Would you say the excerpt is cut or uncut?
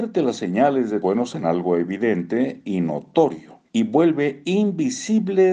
cut